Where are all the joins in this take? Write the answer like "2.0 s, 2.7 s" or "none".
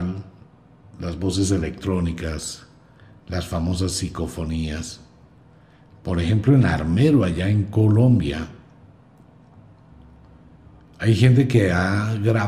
none